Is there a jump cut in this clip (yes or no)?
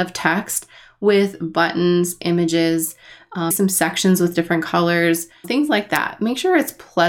yes